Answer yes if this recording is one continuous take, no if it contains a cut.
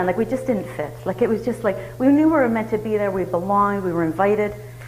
yes